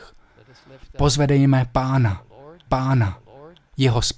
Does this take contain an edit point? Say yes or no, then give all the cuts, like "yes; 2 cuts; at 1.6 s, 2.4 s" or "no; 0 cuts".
yes; 1 cut; at 2.7 s